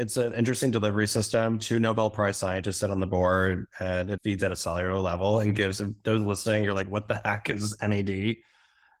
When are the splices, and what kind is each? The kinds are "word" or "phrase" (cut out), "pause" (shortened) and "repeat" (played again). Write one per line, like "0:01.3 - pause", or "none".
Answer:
0:04.2 - word